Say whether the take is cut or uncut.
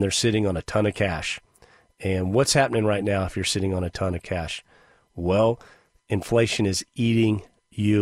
uncut